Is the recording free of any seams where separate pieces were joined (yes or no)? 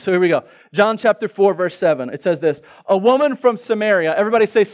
yes